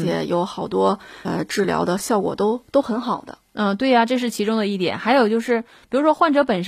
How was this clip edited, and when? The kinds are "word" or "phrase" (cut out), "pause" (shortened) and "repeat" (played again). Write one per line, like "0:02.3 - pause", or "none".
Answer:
0:01.2 - word